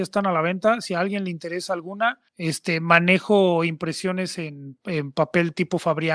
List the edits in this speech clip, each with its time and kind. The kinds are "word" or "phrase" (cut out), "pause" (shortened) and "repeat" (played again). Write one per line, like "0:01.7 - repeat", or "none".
0:02.3 - pause